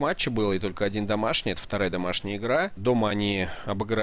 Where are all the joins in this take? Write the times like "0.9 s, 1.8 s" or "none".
none